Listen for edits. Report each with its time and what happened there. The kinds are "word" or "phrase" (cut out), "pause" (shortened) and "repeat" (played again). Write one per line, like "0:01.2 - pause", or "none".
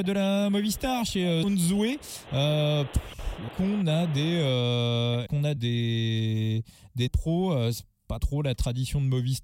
0:01.4 - word
0:03.5 - word
0:05.3 - word
0:05.6 - word
0:07.1 - word
0:08.2 - word